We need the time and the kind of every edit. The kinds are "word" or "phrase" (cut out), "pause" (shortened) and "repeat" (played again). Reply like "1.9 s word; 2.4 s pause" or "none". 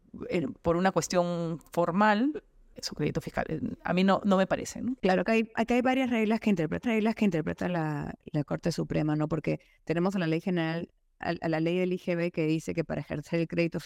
2.7 s word; 6.8 s repeat